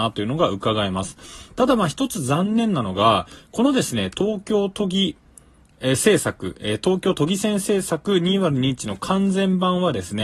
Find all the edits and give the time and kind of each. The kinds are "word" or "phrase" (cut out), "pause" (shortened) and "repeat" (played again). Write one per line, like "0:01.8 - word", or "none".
none